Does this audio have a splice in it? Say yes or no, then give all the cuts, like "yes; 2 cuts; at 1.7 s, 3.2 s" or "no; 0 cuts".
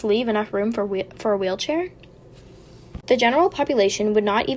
yes; 1 cut; at 3.0 s